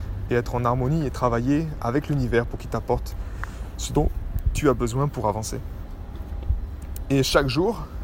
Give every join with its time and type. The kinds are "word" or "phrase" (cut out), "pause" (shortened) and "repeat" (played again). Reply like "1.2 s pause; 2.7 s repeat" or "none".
none